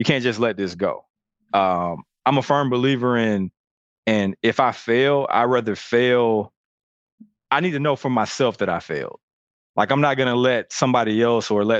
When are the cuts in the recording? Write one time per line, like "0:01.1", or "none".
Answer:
none